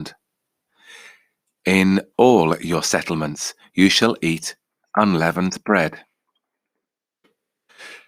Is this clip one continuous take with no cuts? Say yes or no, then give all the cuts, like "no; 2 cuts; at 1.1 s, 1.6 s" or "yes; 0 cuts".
yes; 0 cuts